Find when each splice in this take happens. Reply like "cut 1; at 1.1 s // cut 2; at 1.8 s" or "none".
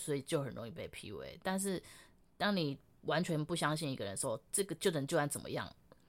none